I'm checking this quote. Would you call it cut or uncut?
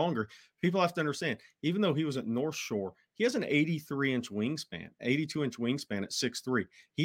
uncut